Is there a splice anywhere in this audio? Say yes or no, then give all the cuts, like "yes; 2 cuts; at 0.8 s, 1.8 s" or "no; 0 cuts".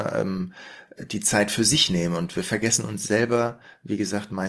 no; 0 cuts